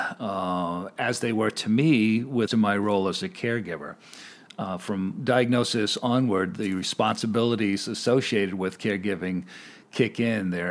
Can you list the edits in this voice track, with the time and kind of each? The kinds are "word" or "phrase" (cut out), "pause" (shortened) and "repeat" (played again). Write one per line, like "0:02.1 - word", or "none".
0:02.5 - word

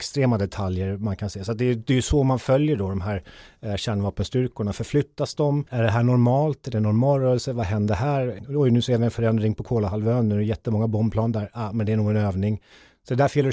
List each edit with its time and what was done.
0:05.7 - pause

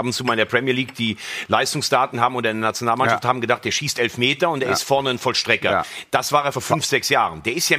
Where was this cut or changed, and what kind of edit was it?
0:02.1 - word
0:06.5 - word

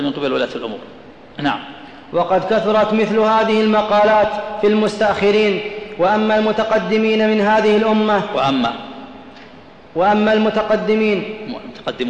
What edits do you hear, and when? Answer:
none

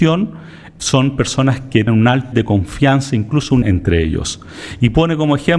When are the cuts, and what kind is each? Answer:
0:01.9 - word
0:02.3 - word
0:03.6 - phrase

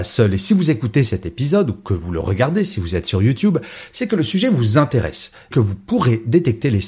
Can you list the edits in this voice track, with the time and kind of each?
0:05.5 - word

